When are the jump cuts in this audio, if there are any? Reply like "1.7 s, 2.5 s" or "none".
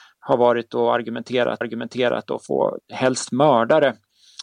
1.6 s, 2.5 s, 2.8 s

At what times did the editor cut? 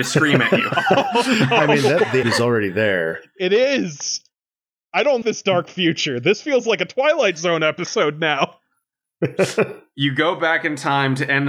2.2 s, 5.2 s

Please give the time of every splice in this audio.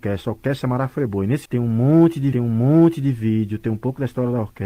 1.5 s, 2.3 s

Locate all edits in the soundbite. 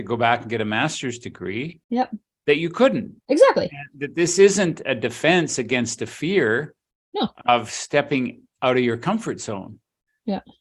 1.8 s, 3.2 s

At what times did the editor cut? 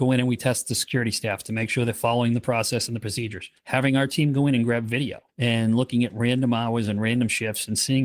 3.6 s, 5.3 s

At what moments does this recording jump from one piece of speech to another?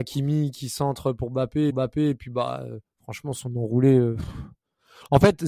1.7 s

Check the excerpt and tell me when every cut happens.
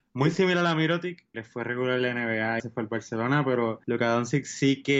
1.3 s, 2.6 s, 3.8 s

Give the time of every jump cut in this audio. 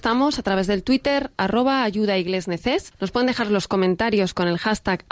2.9 s

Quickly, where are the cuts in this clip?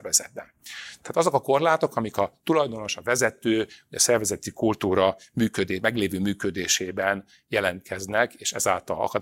none

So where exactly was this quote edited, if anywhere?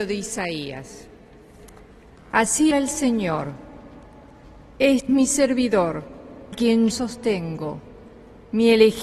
2.7 s, 5.1 s, 6.5 s, 6.9 s

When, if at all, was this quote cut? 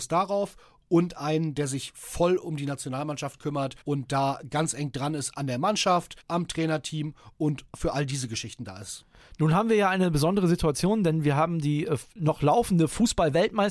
3.8 s, 6.2 s

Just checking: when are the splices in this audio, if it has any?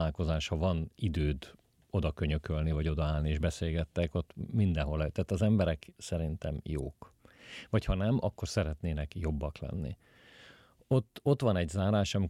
none

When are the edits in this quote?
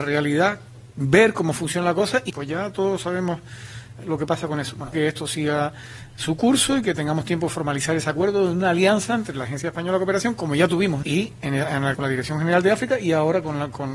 2.3 s, 4.9 s, 11.0 s, 11.9 s

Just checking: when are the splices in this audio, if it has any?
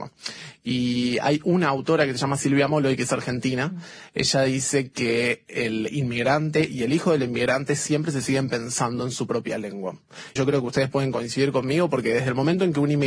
10.4 s

